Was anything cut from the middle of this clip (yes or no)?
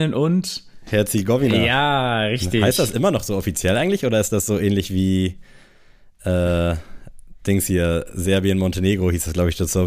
no